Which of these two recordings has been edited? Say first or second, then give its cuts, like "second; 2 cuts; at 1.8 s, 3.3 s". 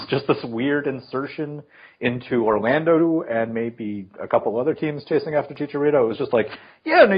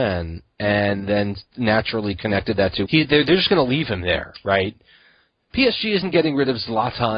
second; 1 cut; at 2.9 s